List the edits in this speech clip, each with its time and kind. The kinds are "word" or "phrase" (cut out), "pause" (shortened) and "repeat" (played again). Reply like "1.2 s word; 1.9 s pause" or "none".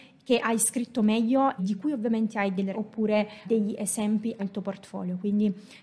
1.6 s word; 2.7 s word; 3.5 s word; 4.4 s word